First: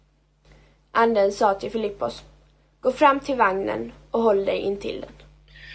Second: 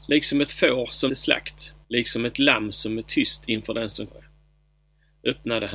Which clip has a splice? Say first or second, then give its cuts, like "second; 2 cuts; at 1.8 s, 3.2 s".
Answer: second; 3 cuts; at 1.1 s, 1.8 s, 4.1 s